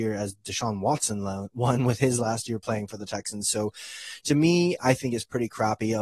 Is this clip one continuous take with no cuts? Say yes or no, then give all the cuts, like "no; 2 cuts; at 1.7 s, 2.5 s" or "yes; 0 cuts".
yes; 0 cuts